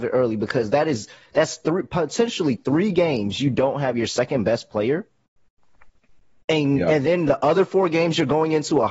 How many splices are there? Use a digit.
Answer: 0